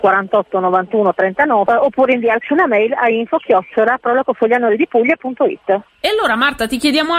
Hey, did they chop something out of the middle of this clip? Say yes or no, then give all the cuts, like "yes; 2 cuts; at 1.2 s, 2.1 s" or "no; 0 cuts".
yes; 2 cuts; at 1.7 s, 5.9 s